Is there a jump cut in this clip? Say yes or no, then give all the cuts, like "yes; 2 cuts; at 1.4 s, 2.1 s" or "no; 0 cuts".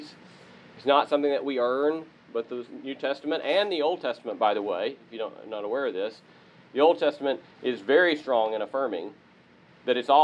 no; 0 cuts